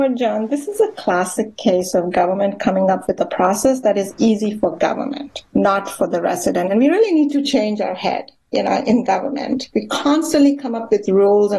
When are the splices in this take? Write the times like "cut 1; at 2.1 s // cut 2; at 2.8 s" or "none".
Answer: cut 1; at 5.5 s // cut 2; at 9.7 s